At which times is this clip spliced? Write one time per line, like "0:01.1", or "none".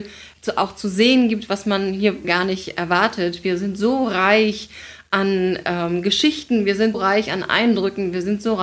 0:02.2
0:06.9

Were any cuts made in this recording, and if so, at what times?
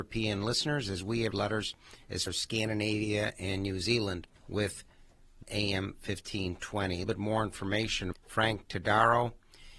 0:01.3
0:02.3
0:04.4
0:05.4
0:07.0
0:08.1

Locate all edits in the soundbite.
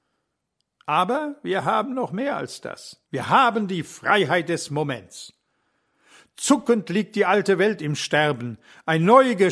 0:03.0

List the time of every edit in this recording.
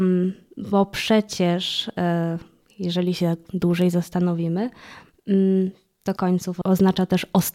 0:06.2

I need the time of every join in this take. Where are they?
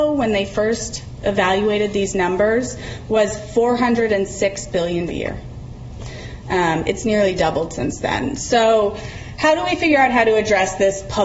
0:05.1

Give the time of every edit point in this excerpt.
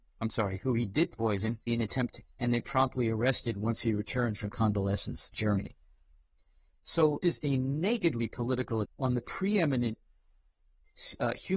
0:01.7
0:02.2
0:05.3
0:07.2
0:08.8

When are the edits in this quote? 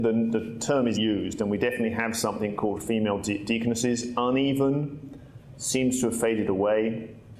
0:01.0

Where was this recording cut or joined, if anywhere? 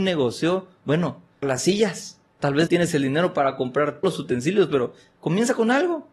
0:01.4
0:02.3
0:02.7
0:04.0

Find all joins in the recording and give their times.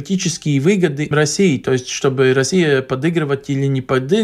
0:01.1

